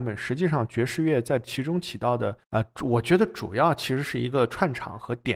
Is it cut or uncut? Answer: cut